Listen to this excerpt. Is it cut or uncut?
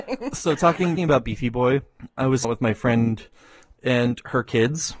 cut